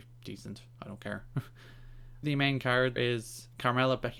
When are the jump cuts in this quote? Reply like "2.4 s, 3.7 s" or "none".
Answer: 2.2 s, 3.0 s